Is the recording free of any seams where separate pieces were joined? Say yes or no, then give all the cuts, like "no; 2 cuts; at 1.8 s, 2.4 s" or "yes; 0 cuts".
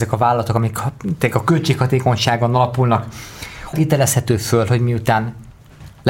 no; 1 cut; at 3.7 s